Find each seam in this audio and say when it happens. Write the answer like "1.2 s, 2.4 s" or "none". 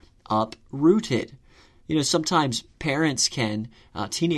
none